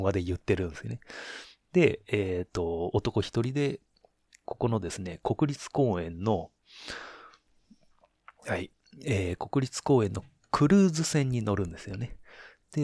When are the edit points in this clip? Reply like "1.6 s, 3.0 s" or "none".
none